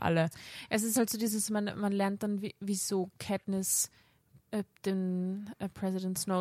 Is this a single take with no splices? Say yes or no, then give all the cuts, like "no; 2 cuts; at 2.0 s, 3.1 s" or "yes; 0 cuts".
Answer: yes; 0 cuts